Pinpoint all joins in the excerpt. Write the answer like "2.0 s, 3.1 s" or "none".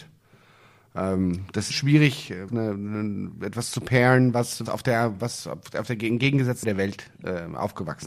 1.7 s, 2.5 s, 4.6 s, 6.6 s